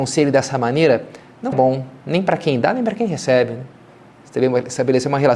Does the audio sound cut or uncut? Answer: cut